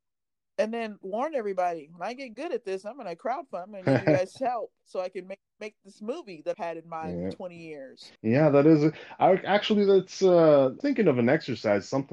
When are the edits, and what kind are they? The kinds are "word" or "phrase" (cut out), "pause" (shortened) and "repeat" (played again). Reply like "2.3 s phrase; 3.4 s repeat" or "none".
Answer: 1.0 s word; 4.8 s pause; 6.5 s word; 8.2 s pause; 10.8 s phrase

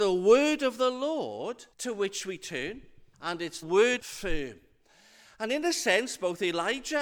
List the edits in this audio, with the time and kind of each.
1.7 s pause; 3.1 s pause; 3.6 s word; 4.0 s phrase

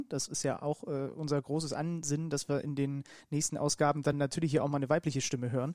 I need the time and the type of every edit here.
none

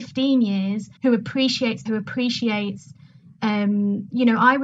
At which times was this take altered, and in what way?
1.0 s pause; 1.9 s word

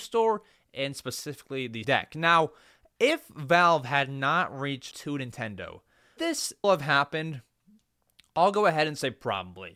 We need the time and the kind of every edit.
1.8 s word; 4.9 s word; 6.2 s word; 6.6 s word

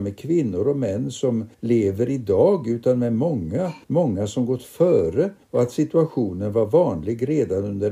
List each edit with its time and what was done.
1.5 s pause; 3.8 s pause; 5.4 s pause

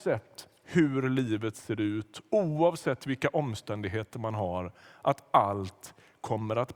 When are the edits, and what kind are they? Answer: none

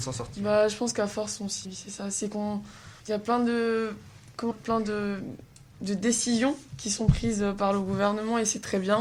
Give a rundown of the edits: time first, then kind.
1.6 s word; 3.0 s pause; 4.5 s word; 6.7 s pause

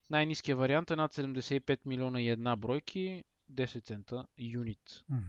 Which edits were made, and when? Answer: 4.3 s word

